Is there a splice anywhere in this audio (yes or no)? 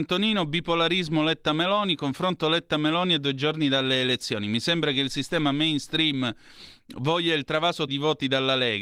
yes